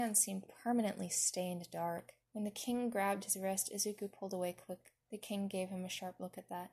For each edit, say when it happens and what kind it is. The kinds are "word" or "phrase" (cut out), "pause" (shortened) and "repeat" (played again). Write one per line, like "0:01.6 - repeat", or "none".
0:02.2 - pause
0:05.0 - pause